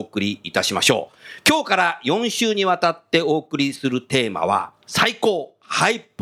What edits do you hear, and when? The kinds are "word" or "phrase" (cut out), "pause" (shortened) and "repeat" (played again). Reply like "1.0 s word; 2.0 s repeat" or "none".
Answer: 4.8 s pause